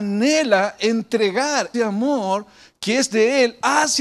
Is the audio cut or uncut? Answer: cut